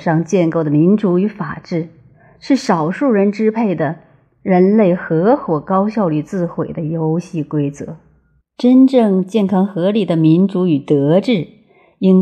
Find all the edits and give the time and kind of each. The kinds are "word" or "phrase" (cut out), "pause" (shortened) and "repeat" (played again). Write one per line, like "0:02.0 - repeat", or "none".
none

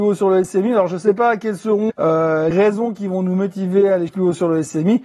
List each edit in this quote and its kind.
0:01.9 - word
0:02.5 - word
0:04.1 - word

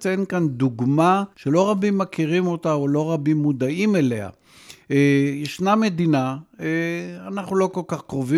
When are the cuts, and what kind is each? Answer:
0:01.3 - pause

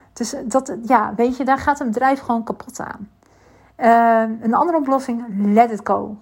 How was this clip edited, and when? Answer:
none

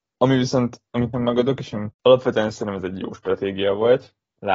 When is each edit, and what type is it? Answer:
0:01.1 - word
0:01.9 - phrase

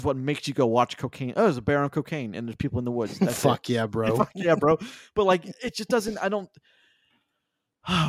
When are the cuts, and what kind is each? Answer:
none

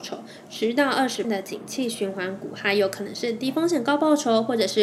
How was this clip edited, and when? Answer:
0:01.2 - word

